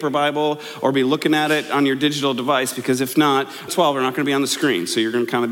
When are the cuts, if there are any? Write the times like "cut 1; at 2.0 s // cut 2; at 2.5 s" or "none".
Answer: cut 1; at 3.7 s